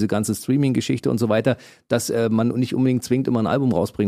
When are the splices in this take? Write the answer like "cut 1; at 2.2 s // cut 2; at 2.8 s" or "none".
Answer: none